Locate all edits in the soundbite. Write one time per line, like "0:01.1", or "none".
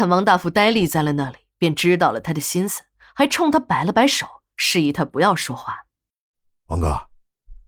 none